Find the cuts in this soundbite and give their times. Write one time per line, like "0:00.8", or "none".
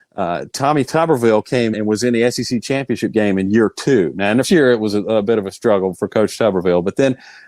0:01.7
0:04.4
0:06.0